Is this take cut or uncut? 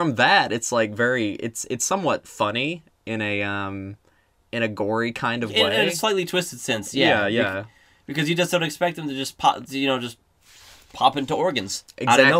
uncut